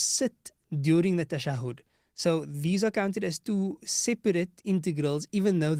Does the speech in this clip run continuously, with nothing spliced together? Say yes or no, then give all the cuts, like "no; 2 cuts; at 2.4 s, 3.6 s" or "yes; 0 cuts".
yes; 0 cuts